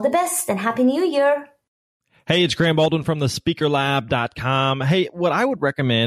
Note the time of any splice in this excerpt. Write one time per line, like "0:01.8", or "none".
none